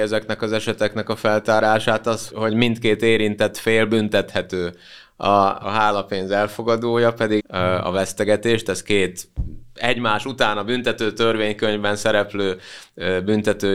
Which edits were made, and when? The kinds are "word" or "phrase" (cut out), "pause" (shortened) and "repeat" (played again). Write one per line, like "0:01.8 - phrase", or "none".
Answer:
0:02.3 - word
0:05.6 - phrase
0:07.4 - word